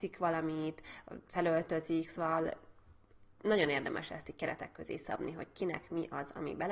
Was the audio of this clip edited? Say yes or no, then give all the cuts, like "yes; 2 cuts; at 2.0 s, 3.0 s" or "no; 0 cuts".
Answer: no; 0 cuts